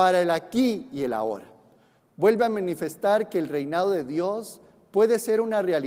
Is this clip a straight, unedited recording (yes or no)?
yes